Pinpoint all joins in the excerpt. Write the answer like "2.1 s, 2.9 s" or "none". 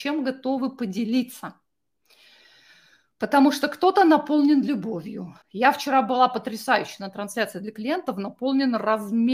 5.4 s